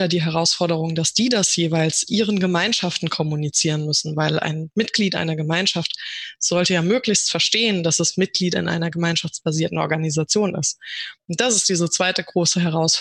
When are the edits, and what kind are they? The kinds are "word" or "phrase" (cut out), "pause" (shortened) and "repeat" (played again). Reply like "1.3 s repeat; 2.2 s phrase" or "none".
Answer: none